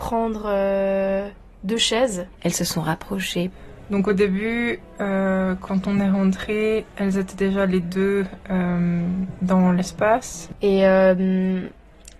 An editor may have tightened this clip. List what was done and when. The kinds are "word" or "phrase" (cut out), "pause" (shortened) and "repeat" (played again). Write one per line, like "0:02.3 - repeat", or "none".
none